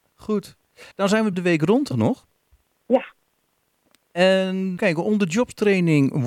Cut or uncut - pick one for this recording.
cut